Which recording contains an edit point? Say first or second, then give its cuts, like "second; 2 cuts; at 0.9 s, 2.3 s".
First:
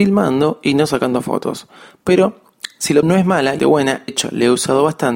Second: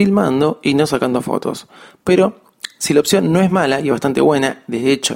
first; 3 cuts; at 3.0 s, 3.6 s, 4.1 s